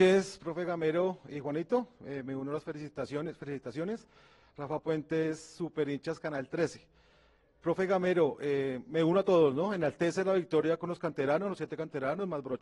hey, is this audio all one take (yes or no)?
yes